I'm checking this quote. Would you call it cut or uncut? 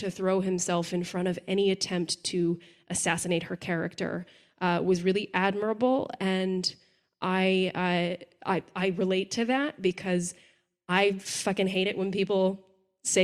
uncut